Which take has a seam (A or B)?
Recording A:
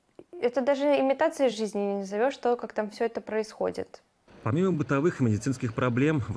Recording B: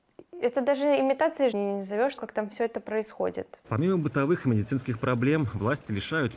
B